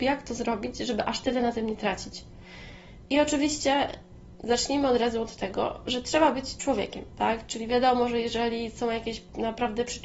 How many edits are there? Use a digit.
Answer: 0